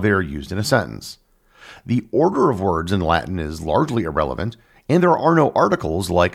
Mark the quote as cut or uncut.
uncut